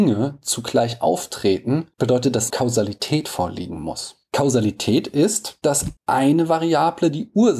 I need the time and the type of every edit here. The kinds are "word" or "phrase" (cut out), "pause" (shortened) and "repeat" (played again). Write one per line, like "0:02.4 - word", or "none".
0:01.9 - pause
0:02.5 - phrase
0:06.0 - pause